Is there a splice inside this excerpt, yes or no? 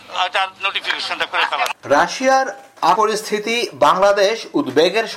yes